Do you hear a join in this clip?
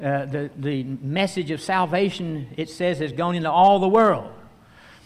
no; 0 cuts

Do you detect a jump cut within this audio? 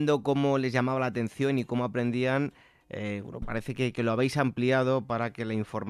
no; 0 cuts

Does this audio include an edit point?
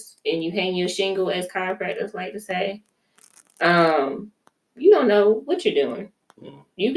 no; 0 cuts

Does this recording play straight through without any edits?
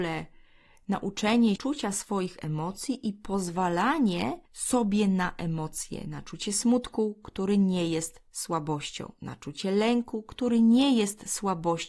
no; 2 cuts; at 1.6 s, 4.5 s

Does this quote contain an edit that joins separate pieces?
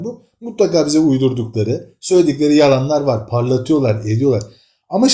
no; 0 cuts

